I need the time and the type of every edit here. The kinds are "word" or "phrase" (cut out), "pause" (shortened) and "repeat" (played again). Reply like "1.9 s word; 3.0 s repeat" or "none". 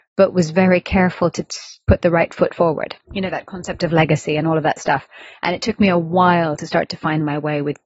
3.0 s pause